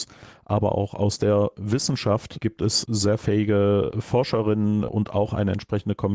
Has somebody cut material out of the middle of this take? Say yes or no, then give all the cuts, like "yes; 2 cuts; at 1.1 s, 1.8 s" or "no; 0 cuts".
no; 0 cuts